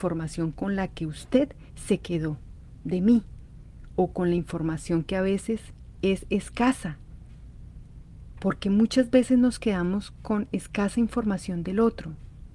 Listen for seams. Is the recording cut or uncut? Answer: uncut